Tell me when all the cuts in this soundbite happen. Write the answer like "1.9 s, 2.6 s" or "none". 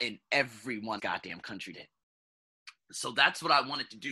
1.0 s, 1.7 s